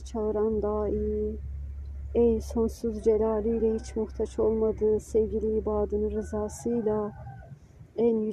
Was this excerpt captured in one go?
yes; 0 cuts

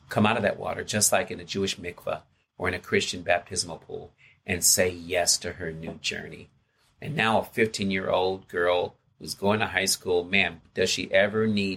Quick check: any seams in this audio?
no; 0 cuts

